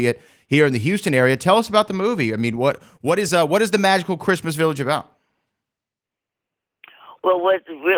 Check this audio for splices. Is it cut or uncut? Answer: uncut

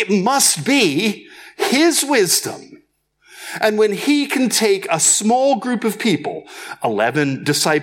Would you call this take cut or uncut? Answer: uncut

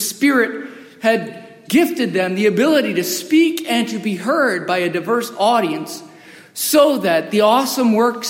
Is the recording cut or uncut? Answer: uncut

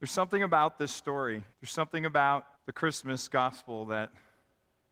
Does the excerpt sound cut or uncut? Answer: cut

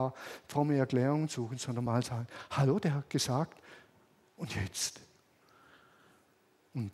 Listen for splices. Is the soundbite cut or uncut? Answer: uncut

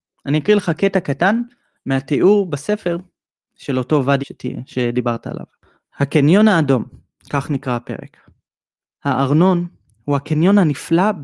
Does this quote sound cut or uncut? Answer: cut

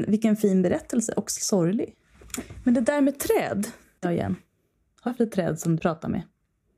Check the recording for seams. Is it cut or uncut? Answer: cut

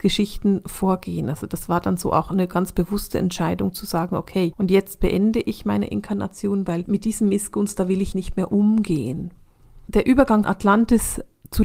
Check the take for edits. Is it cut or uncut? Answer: cut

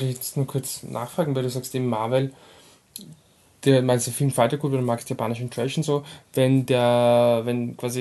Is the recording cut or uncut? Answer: uncut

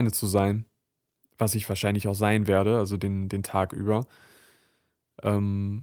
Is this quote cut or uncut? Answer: uncut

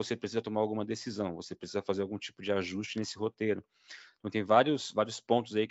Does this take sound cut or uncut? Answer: uncut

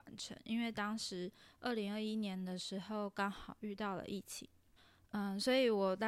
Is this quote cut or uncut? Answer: cut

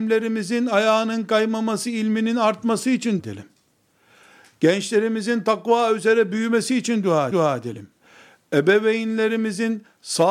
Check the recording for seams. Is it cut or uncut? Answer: cut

